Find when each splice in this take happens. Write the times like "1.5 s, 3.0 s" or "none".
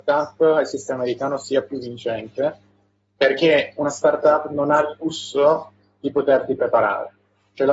none